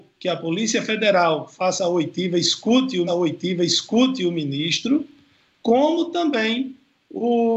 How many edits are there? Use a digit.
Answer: 1